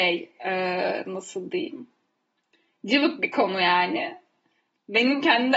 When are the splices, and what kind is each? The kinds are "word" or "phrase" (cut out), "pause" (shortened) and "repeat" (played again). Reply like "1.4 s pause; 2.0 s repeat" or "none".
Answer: none